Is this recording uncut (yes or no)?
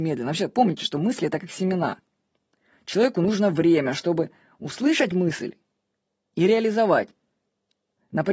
yes